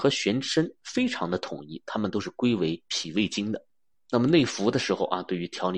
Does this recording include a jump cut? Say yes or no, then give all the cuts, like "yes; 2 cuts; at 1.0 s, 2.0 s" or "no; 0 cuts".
yes; 1 cut; at 3.9 s